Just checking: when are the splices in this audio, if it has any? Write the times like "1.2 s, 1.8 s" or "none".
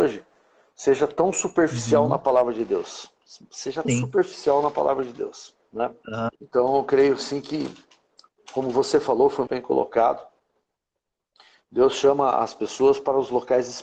3.8 s, 6.4 s, 9.5 s